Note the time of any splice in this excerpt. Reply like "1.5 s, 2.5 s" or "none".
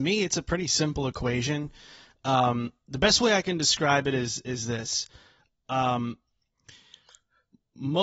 none